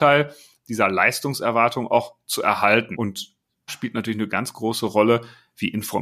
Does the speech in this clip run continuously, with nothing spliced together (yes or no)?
no